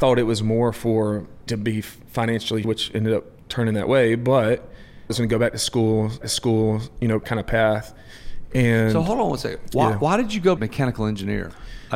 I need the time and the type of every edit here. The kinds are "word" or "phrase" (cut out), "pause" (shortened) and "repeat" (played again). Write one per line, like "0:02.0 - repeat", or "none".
0:01.5 - word
0:02.6 - word
0:03.4 - pause
0:05.1 - phrase
0:06.2 - repeat
0:07.2 - word
0:10.6 - phrase